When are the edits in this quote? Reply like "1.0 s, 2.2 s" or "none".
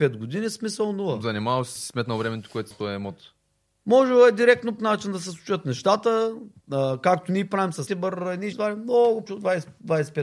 1.8 s, 2.7 s, 4.8 s, 6.6 s, 7.9 s, 8.5 s, 9.3 s